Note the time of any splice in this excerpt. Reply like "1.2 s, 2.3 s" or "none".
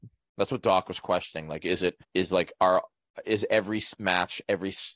2.0 s